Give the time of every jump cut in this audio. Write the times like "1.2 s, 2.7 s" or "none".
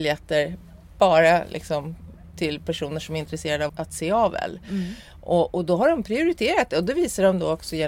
3.7 s